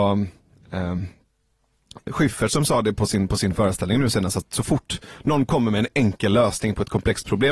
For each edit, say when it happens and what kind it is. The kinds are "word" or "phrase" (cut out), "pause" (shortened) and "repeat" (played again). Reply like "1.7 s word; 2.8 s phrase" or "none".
none

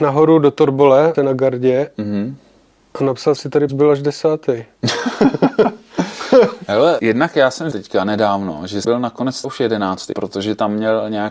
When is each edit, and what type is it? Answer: 1.1 s word; 3.4 s word; 3.7 s word; 7.0 s word; 7.7 s word; 8.8 s word; 9.4 s word; 10.1 s word

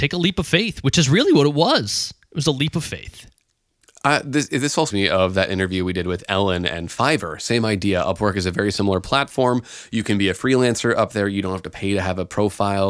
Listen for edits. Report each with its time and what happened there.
4.9 s word

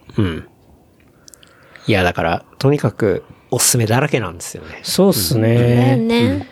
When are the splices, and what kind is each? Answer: none

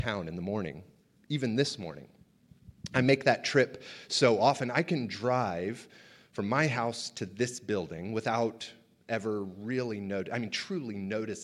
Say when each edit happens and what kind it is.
none

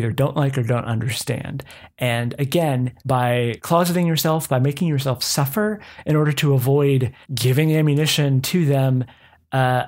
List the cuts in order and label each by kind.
3.0 s pause; 7.2 s pause

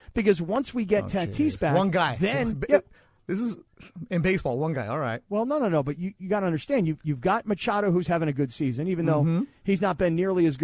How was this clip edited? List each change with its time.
none

